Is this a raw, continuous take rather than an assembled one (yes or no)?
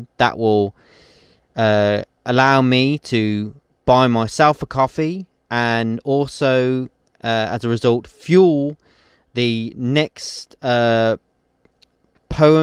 yes